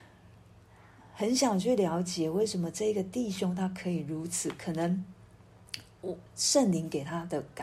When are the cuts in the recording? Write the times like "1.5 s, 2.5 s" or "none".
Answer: 6.3 s